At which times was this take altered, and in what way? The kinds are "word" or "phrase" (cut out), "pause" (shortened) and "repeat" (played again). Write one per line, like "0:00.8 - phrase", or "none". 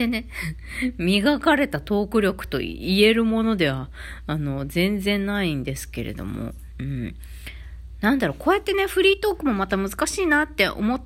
none